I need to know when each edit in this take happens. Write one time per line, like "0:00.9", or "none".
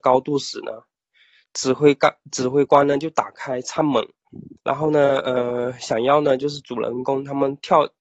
0:04.6